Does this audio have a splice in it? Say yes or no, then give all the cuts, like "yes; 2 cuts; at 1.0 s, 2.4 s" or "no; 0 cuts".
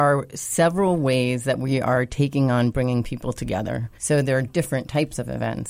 yes; 1 cut; at 4.0 s